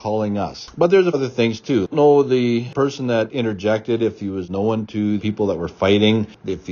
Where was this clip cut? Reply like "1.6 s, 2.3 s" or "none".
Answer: 1.1 s, 1.9 s, 5.2 s